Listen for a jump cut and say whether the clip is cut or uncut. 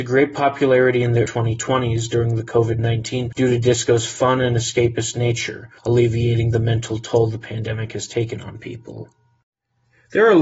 cut